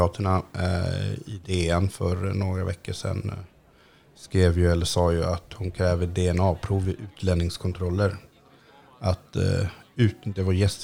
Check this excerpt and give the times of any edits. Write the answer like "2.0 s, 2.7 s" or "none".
none